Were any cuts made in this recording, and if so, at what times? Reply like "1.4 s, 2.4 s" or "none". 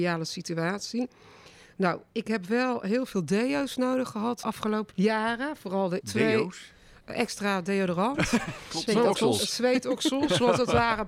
4.4 s, 4.9 s, 6.0 s